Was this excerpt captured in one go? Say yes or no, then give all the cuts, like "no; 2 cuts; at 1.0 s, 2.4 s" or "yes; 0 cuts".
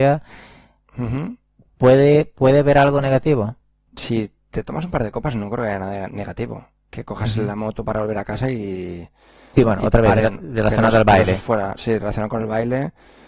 yes; 0 cuts